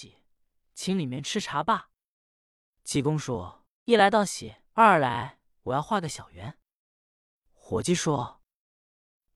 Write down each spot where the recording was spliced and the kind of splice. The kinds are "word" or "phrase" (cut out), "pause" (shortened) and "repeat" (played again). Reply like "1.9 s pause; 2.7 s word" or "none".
4.7 s pause